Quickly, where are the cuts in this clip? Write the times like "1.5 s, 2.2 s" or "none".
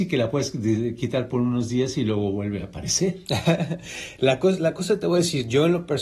none